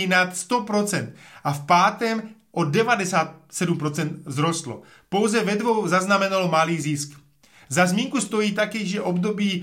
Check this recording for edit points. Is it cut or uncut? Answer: uncut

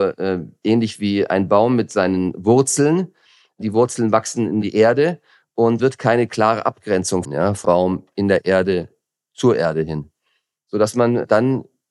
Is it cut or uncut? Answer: cut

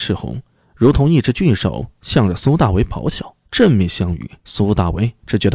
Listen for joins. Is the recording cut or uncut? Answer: cut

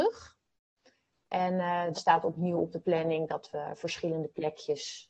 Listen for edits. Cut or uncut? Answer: cut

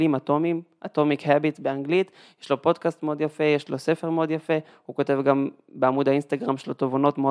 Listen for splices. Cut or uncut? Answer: uncut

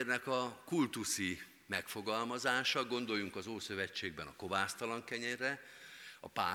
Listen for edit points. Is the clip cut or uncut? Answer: uncut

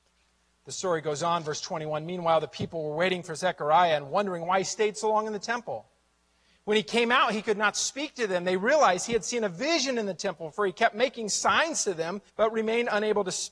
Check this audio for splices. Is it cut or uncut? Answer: cut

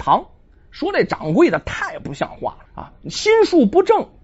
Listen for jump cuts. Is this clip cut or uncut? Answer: cut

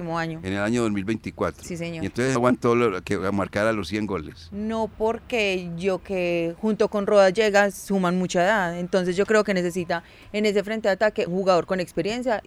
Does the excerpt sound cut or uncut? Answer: cut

